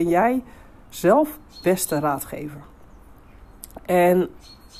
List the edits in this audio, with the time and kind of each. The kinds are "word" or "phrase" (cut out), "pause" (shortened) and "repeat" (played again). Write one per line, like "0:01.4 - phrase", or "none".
0:01.6 - word